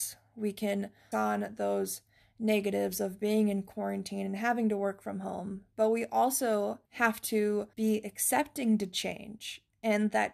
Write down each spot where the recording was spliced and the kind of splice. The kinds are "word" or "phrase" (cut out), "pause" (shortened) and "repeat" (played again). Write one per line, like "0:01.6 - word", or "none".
0:01.1 - word
0:06.9 - pause
0:07.7 - pause

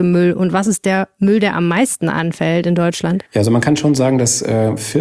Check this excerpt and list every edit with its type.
0:03.3 - pause

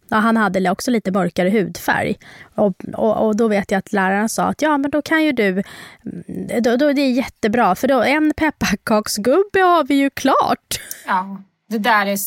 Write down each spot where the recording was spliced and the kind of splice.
none

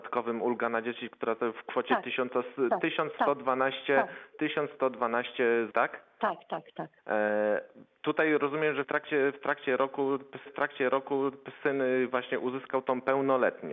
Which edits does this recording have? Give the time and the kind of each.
0:05.7 - word
0:07.0 - pause
0:08.8 - word
0:10.5 - repeat

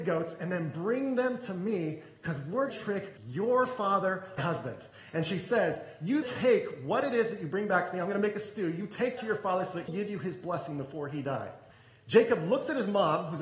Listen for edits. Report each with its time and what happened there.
0:02.7 - word
0:03.2 - pause
0:04.4 - word
0:06.2 - word
0:09.2 - word
0:09.9 - phrase
0:11.7 - pause

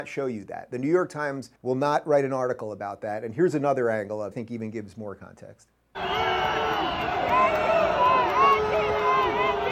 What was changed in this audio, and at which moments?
0:01.6 - pause
0:04.3 - phrase

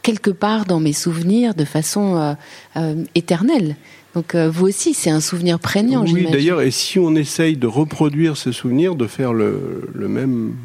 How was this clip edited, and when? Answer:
none

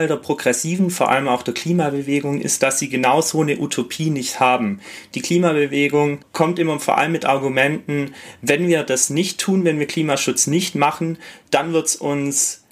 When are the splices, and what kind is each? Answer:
none

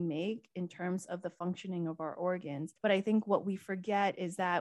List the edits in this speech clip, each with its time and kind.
0:02.8 - pause

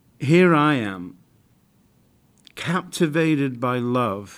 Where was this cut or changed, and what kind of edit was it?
none

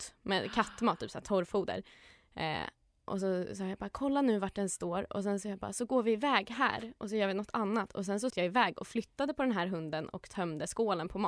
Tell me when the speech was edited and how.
0:08.3 - word

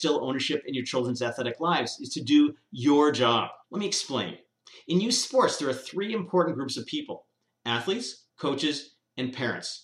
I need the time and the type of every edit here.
0:03.6 - pause
0:08.3 - pause

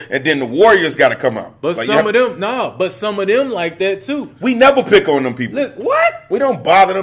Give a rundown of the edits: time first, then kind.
none

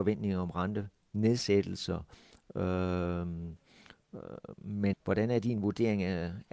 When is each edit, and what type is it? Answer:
0:04.9 - word

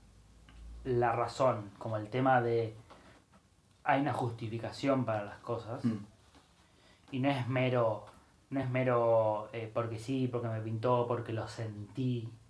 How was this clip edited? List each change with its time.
none

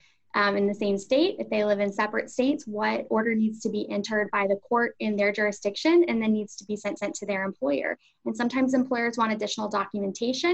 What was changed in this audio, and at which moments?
0:07.0 - repeat

